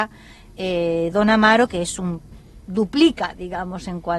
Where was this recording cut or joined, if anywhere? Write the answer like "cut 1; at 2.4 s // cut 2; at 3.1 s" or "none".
none